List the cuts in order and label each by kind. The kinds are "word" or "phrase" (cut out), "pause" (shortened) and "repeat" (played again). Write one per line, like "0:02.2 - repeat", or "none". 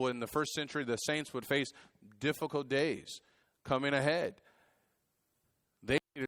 none

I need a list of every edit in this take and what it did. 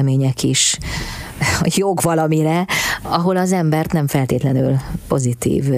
none

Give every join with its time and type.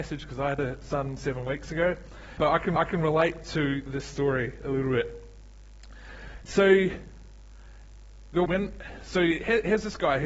0:02.4 - word
0:02.8 - repeat
0:08.5 - phrase

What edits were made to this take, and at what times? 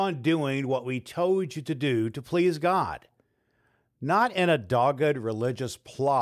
none

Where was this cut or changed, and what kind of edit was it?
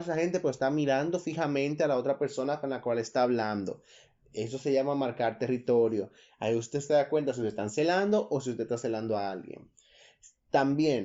none

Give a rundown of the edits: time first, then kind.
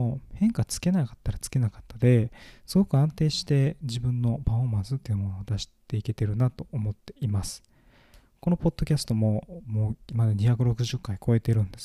0:05.8 - pause

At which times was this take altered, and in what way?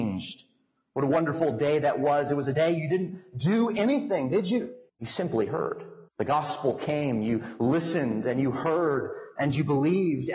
0:04.9 - pause
0:06.1 - pause

